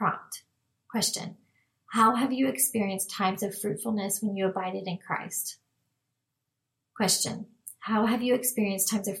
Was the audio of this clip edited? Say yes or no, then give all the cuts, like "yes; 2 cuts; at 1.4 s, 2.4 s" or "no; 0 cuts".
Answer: no; 0 cuts